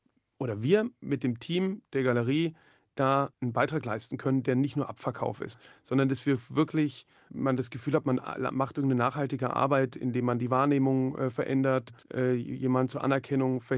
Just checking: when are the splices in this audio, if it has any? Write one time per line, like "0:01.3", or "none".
0:03.3
0:12.0